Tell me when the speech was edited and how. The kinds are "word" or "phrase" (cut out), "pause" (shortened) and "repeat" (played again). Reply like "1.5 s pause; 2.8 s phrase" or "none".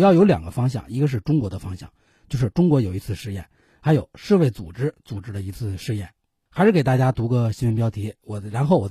none